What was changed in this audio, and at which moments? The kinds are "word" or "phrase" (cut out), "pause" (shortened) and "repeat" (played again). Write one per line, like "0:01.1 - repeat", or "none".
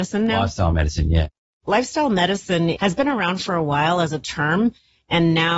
none